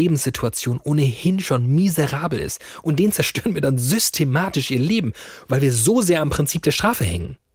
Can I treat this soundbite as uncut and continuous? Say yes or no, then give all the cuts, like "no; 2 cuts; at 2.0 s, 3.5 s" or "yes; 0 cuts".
yes; 0 cuts